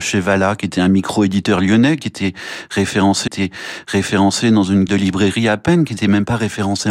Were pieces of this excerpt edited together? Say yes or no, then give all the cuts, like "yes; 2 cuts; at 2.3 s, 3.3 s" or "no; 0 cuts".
yes; 2 cuts; at 3.3 s, 4.9 s